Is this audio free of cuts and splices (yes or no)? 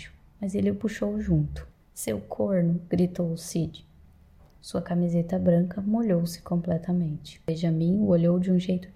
yes